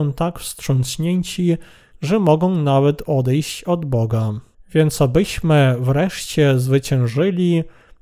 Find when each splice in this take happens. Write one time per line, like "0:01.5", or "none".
0:01.9
0:04.5